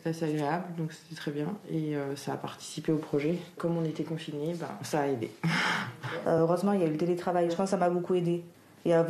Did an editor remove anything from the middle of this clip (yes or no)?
no